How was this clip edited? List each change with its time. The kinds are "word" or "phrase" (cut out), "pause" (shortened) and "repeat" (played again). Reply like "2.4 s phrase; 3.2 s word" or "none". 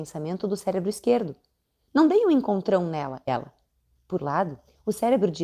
3.3 s word; 4.2 s word